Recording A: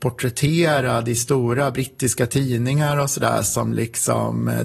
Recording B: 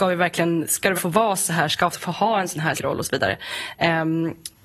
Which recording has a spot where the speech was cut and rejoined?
B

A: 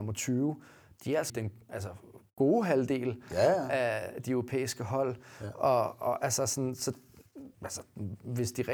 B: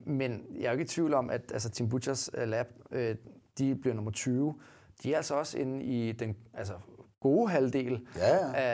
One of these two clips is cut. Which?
A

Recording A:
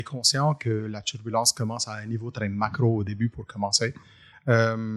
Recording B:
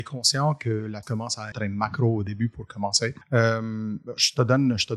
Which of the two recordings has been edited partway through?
B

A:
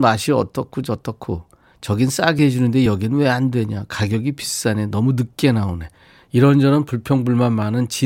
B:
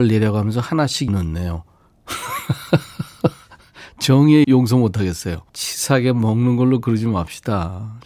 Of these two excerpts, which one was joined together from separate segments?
B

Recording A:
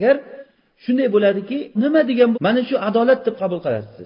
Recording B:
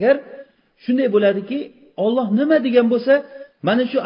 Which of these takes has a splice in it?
A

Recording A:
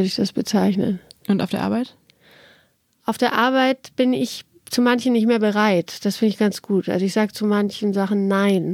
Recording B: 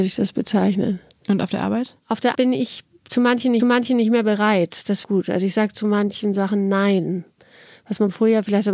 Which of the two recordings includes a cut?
B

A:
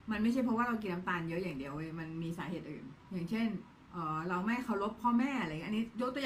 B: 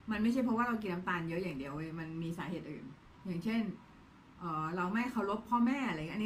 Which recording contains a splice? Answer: A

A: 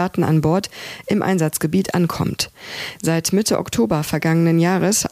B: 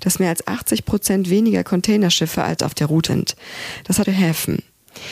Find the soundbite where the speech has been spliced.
B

